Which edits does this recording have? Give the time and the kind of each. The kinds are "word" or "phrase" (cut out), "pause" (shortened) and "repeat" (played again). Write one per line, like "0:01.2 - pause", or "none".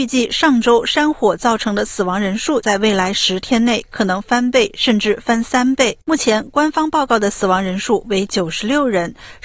0:06.0 - pause